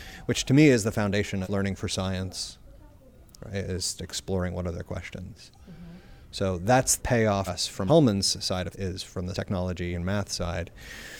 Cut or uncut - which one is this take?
cut